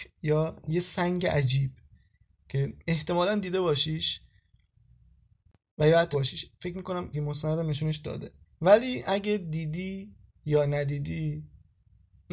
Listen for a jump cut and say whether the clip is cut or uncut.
cut